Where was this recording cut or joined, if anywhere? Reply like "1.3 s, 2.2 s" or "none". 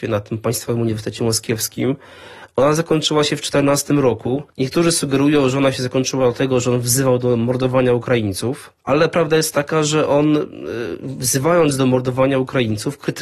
4.5 s, 8.8 s